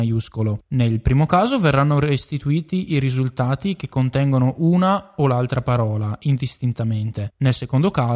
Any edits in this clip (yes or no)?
no